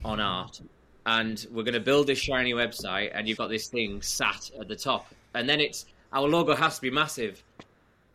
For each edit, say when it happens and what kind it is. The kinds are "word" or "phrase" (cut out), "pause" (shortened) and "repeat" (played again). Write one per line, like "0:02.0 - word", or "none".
0:03.4 - word